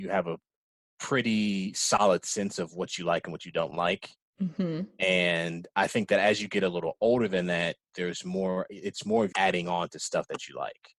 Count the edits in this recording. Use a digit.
1